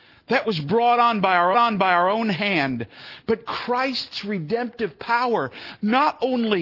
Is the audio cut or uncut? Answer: cut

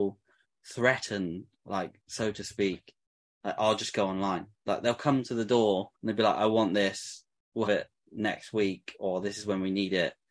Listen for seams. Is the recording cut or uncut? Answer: cut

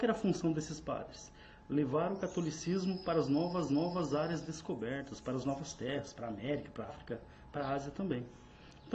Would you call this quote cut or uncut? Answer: cut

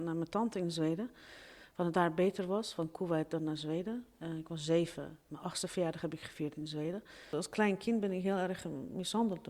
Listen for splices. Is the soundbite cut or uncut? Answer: uncut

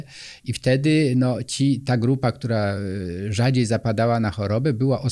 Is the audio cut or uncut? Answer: uncut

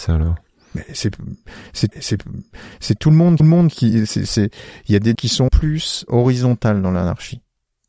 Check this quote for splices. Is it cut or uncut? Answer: cut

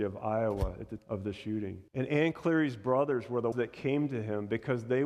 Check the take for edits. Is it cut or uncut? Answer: cut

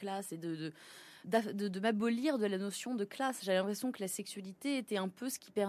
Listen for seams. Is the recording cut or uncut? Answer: cut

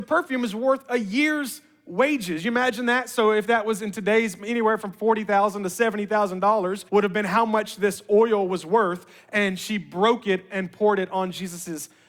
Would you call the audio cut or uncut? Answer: cut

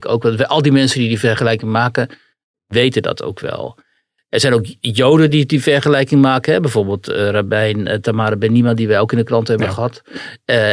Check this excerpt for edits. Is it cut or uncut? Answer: uncut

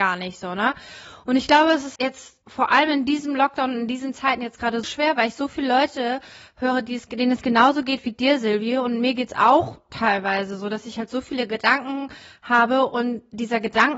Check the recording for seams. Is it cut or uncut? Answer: cut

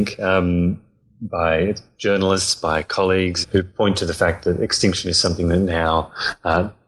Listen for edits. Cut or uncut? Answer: cut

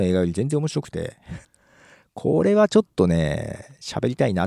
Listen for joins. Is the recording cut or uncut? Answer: cut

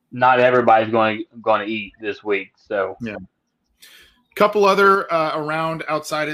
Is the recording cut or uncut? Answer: uncut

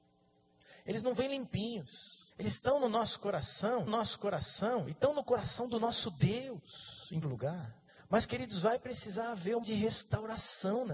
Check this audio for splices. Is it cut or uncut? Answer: cut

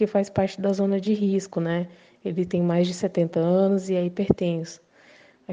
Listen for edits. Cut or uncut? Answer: uncut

